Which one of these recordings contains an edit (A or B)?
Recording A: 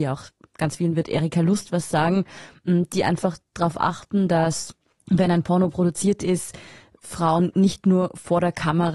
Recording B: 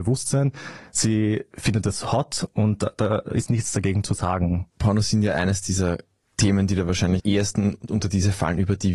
B